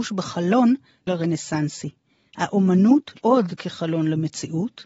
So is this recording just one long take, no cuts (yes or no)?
no